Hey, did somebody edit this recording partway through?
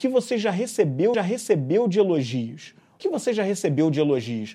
yes; 2 cuts; at 1.1 s, 3.0 s

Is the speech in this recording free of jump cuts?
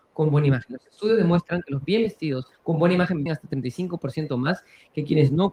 no; 2 cuts; at 2.5 s, 3.3 s

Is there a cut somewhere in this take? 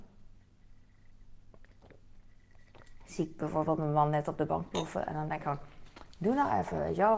no; 0 cuts

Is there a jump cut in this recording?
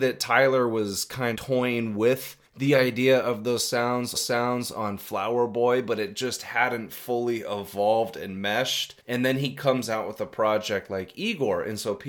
yes; 4 cuts; at 1.3 s, 2.5 s, 4.1 s, 9.0 s

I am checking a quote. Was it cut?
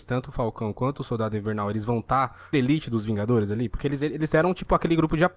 yes; 1 cut; at 2.5 s

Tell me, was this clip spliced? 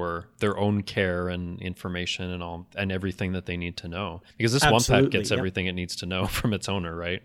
yes; 1 cut; at 4.3 s

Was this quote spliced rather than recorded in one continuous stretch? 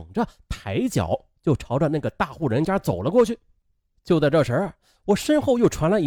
no; 0 cuts

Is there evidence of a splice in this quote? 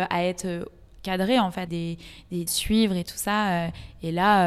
yes; 2 cuts; at 1.7 s, 2.5 s

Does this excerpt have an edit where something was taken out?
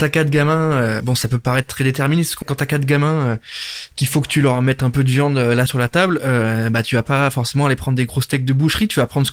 yes; 2 cuts; at 2.4 s, 5.7 s

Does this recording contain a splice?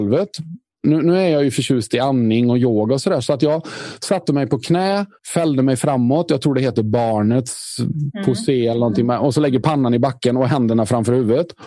yes; 1 cut; at 5.2 s

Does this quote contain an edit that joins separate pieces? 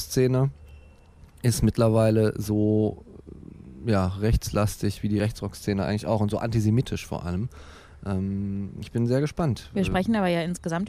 no; 0 cuts

